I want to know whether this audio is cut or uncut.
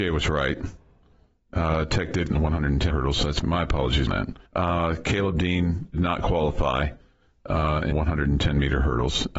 cut